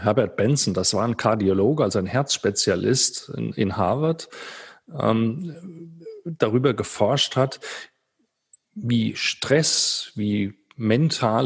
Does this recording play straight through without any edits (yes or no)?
yes